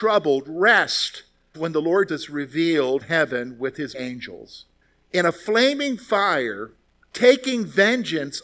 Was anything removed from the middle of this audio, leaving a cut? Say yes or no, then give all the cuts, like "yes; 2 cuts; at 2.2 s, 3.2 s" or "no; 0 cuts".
yes; 5 cuts; at 1.5 s, 2.1 s, 3.0 s, 3.9 s, 4.8 s